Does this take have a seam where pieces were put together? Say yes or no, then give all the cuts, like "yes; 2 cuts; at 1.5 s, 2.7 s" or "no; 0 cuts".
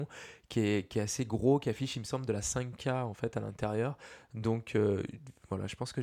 no; 0 cuts